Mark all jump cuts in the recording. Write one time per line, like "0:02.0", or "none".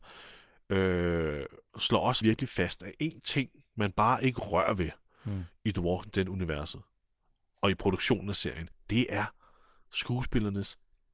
0:02.2
0:08.7

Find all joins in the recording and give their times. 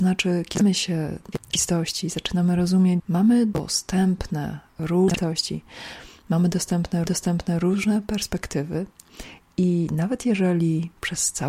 0:01.3
0:03.0
0:07.1

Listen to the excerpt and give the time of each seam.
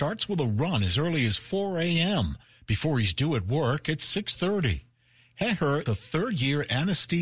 0:05.9

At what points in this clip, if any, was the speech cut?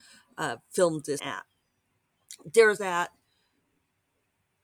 0:01.2
0:02.8

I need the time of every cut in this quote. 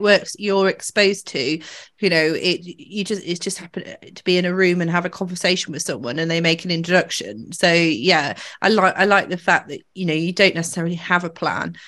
none

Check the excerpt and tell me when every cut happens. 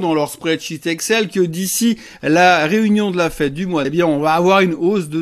0:03.8

